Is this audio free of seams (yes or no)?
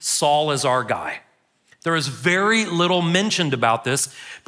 yes